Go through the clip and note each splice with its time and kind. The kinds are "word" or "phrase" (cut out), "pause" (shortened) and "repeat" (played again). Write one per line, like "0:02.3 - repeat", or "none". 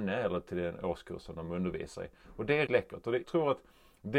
0:02.7 - word
0:03.2 - word